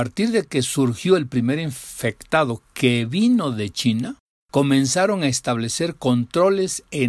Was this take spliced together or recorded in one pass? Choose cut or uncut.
uncut